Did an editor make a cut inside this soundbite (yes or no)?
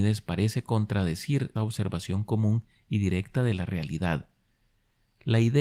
yes